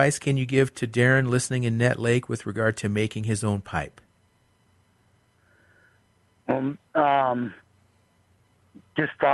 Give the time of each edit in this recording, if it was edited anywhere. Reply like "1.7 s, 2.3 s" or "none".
none